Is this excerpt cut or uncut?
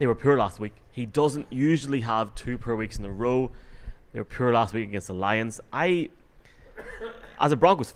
uncut